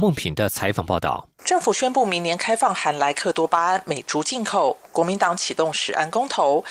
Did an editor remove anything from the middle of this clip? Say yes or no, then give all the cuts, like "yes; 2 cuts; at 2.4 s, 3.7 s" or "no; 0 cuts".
yes; 1 cut; at 1.4 s